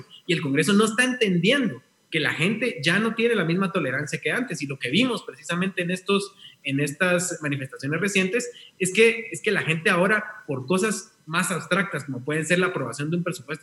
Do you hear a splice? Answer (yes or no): no